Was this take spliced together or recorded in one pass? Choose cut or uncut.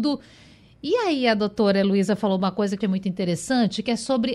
cut